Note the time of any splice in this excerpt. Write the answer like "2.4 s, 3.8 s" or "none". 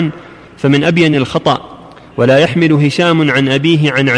none